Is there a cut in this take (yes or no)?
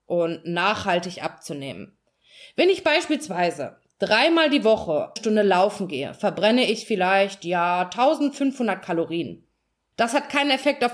yes